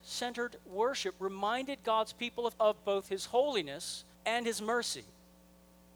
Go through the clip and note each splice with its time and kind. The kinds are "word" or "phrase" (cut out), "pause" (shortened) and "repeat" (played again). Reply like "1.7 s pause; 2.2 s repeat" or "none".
2.5 s phrase; 4.1 s pause